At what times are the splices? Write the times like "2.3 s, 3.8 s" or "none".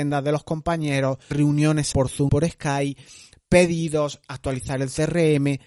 1.3 s, 1.9 s, 2.3 s